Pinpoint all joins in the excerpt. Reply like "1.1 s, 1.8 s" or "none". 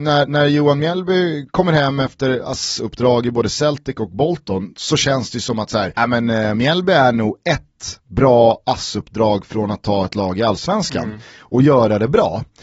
5.9 s